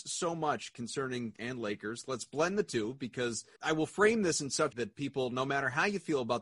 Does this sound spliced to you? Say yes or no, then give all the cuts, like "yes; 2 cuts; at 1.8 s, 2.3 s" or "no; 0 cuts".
yes; 3 cuts; at 1.4 s, 3.6 s, 4.7 s